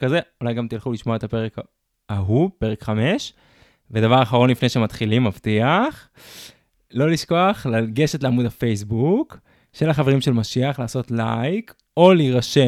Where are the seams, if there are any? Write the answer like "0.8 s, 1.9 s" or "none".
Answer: none